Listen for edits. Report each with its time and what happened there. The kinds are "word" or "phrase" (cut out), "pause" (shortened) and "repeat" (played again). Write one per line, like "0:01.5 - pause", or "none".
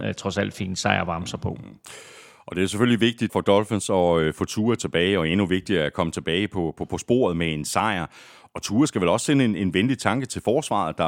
0:03.3 - word